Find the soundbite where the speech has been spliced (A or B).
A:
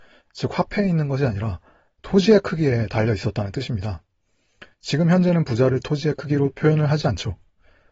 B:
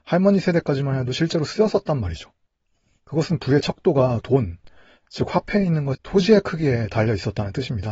B